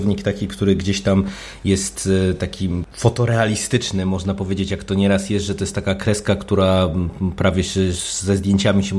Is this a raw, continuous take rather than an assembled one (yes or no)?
yes